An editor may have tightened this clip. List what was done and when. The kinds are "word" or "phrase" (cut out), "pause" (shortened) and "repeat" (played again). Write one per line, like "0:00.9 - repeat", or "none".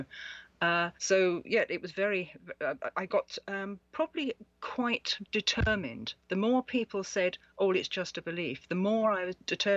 0:01.0 - pause
0:06.2 - pause